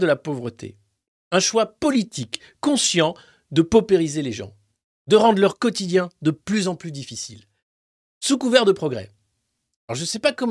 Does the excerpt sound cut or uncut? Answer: uncut